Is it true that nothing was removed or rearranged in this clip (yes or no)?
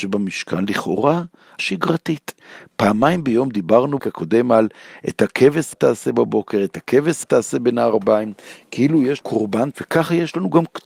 no